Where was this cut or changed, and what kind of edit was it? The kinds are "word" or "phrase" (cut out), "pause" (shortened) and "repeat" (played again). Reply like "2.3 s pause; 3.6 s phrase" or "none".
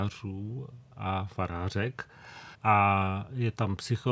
2.5 s pause

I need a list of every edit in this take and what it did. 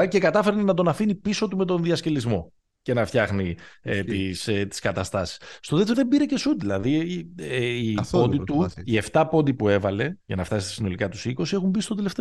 2.6 s pause; 5.9 s word; 10.2 s pause

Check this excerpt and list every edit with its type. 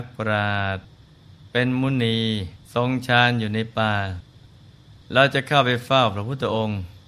2.6 s pause; 5.0 s pause

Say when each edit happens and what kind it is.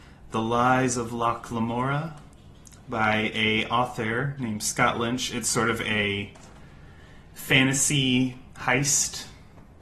none

